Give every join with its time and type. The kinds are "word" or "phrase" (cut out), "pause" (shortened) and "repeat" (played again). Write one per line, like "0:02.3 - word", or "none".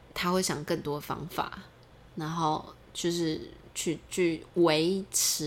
none